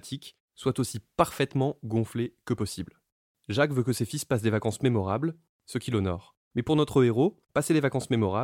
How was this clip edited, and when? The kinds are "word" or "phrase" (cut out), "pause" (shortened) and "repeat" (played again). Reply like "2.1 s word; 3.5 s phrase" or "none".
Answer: 6.4 s pause; 7.5 s pause